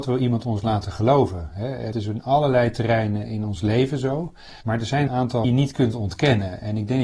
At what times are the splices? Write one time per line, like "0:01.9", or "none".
0:01.9
0:04.6
0:05.1
0:05.4